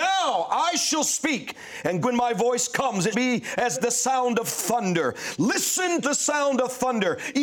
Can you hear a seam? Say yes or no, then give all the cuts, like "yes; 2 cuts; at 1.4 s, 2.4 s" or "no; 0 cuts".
yes; 4 cuts; at 2.0 s, 3.1 s, 3.7 s, 6.0 s